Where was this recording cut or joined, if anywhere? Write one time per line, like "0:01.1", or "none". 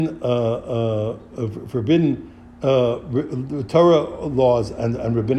none